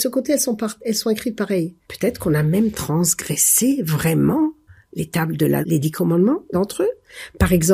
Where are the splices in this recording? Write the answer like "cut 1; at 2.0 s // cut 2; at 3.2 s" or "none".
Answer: cut 1; at 1.8 s // cut 2; at 4.7 s // cut 3; at 5.6 s // cut 4; at 6.5 s